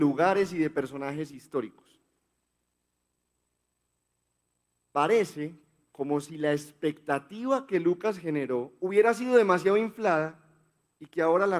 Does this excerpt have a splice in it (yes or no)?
no